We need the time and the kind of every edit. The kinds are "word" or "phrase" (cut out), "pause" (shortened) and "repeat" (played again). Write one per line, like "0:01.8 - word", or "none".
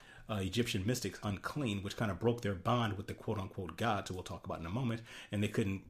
0:01.2 - word

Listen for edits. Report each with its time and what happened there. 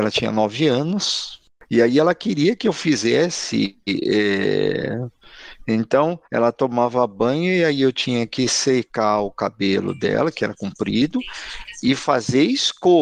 0:01.5 - pause
0:06.2 - pause

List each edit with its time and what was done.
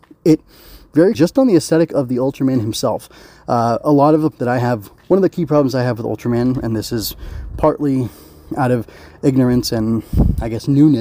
0:01.1 - word
0:04.3 - word
0:05.0 - word

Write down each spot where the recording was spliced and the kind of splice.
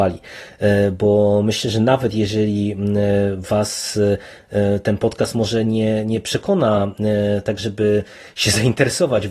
none

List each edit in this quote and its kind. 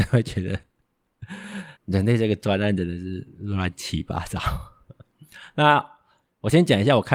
0:01.8 - pause

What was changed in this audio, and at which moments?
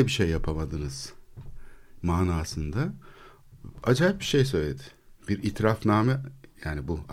none

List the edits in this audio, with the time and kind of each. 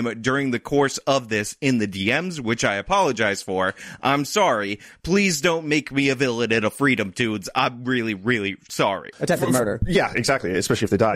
none

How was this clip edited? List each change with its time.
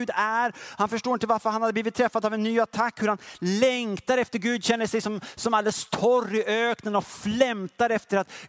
none

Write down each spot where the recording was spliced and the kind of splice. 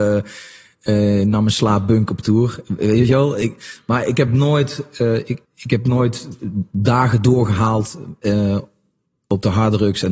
0:05.4 - pause

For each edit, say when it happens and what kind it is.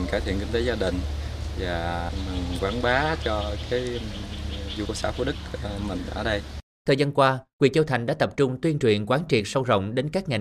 0:04.9 - phrase
0:06.7 - pause

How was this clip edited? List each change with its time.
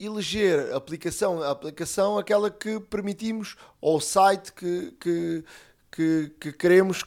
none

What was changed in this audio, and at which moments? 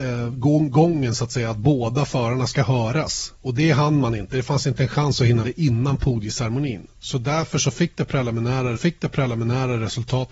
0:03.4 - pause
0:05.4 - word
0:08.8 - repeat

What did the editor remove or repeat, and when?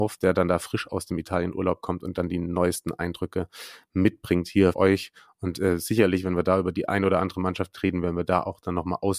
0:04.7 - word

